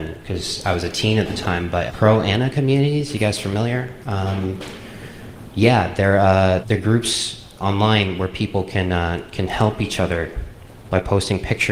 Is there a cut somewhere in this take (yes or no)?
yes